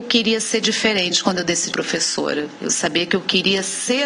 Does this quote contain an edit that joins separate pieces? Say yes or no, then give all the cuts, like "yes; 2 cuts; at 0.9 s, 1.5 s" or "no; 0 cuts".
yes; 1 cut; at 1.7 s